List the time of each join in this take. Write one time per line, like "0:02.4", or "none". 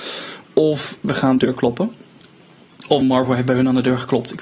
0:01.0
0:01.4
0:03.0